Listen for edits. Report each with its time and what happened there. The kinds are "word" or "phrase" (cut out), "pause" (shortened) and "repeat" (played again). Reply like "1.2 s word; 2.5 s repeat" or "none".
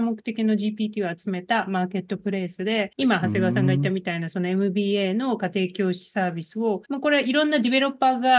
6.8 s pause